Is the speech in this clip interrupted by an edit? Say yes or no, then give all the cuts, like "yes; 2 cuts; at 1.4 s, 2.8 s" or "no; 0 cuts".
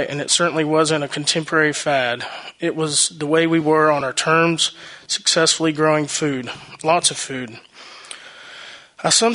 no; 0 cuts